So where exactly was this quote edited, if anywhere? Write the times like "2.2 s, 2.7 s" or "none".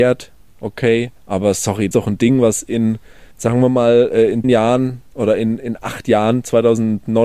1.2 s, 1.9 s, 3.3 s, 4.4 s, 5.1 s